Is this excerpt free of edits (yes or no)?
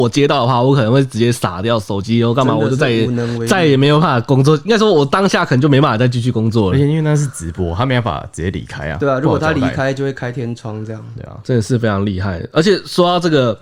no